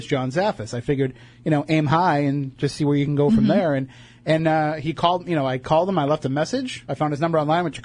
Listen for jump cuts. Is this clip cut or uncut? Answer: uncut